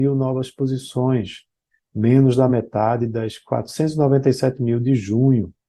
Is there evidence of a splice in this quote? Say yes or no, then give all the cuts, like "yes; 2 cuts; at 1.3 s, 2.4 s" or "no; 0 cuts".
no; 0 cuts